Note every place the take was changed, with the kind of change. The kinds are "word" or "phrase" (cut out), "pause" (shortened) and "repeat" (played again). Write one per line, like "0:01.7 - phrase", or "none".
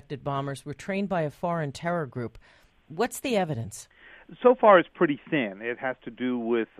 none

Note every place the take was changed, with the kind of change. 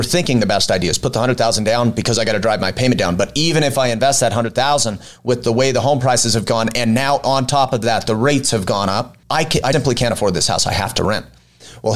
0:09.2 - pause
0:09.7 - word

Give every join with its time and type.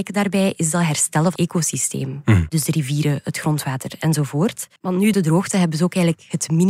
0:01.4 - word
0:04.8 - pause
0:05.1 - word

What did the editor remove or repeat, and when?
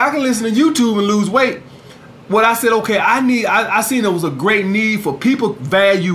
none

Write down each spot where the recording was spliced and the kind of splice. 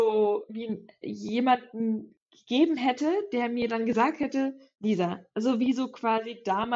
0:01.0 - word
0:04.7 - word

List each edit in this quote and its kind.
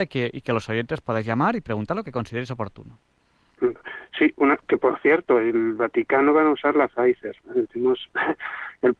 0:07.4 - pause

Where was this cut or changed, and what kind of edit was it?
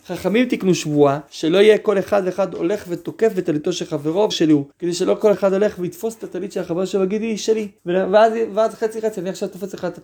0:01.3 - pause
0:04.3 - word
0:04.7 - pause
0:05.3 - word
0:07.8 - pause

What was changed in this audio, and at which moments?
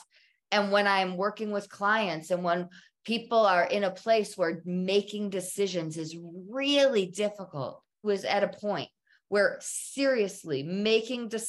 0:08.0 - phrase

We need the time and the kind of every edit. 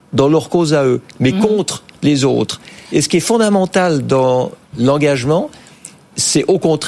none

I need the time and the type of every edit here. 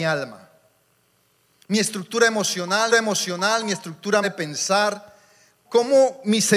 0:02.9 - repeat
0:04.2 - phrase
0:05.6 - word

